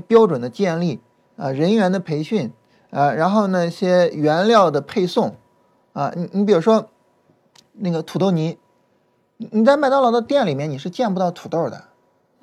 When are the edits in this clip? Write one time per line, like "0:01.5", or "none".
none